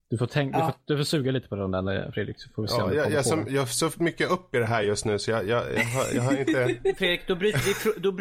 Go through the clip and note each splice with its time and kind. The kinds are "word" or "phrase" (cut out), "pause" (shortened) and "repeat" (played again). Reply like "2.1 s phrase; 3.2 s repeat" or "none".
none